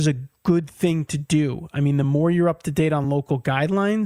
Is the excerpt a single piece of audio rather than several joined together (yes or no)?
yes